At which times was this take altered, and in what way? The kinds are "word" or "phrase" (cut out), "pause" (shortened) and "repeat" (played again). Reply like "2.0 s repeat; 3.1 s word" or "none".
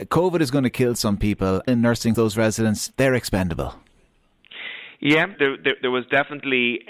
1.7 s phrase; 2.1 s word; 2.9 s pause; 5.3 s word